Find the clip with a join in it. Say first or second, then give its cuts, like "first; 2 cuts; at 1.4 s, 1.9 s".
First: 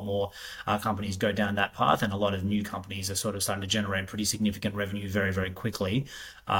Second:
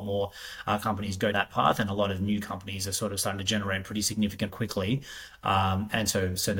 second; 2 cuts; at 1.3 s, 4.5 s